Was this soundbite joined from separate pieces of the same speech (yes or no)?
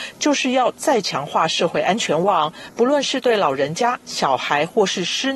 no